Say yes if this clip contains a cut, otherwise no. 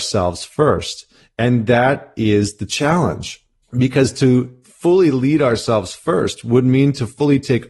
no